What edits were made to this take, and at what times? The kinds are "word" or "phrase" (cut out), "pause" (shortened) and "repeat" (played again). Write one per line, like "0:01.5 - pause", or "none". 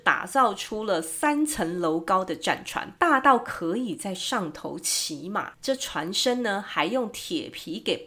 0:05.5 - pause